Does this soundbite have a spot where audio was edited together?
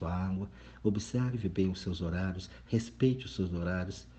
no; 0 cuts

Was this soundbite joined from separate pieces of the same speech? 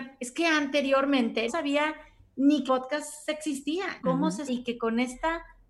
yes; 4 cuts; at 1.5 s, 2.7 s, 4.0 s, 4.5 s

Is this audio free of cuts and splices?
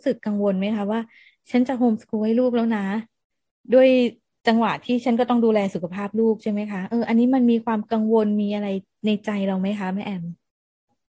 yes; 0 cuts

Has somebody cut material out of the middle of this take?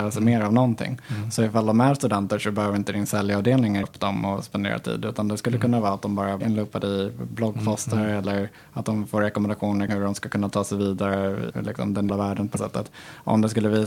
yes; 6 cuts; at 3.8 s, 6.4 s, 9.9 s, 11.5 s, 12.1 s, 12.6 s

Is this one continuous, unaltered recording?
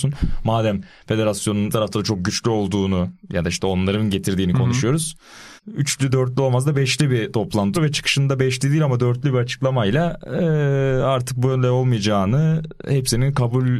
no; 3 cuts; at 1.7 s, 5.6 s, 7.7 s

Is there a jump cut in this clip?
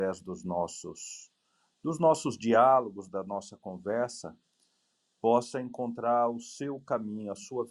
no; 0 cuts

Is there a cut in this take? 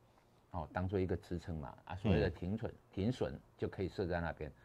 yes; 1 cut; at 2.8 s

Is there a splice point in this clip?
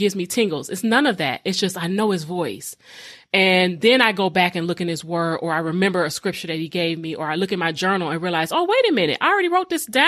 no; 0 cuts

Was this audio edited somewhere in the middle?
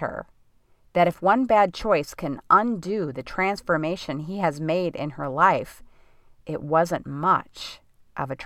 no; 0 cuts

